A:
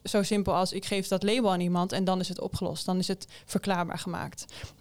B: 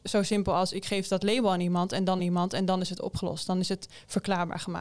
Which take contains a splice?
B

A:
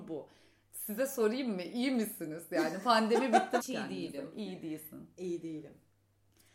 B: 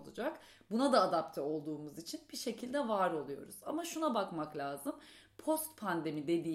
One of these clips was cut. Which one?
A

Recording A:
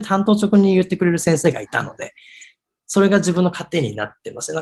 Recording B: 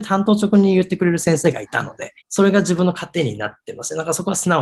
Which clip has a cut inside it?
B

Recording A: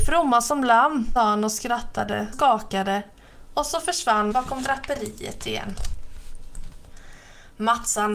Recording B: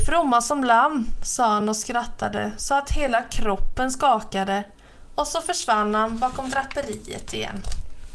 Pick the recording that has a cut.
A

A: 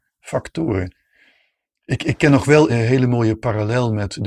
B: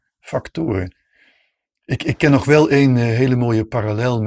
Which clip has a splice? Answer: A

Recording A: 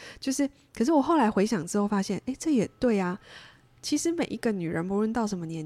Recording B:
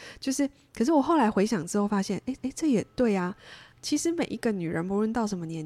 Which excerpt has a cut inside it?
B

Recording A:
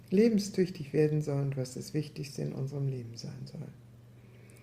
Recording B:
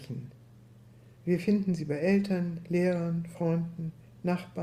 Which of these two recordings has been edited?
B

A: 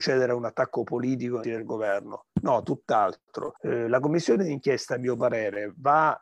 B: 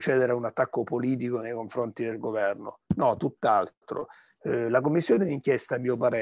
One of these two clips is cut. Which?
A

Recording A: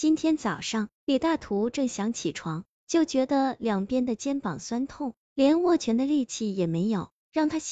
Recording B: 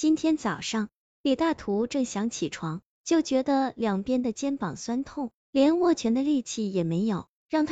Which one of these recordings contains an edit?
A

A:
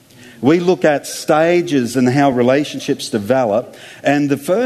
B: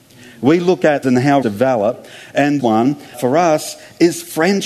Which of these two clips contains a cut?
B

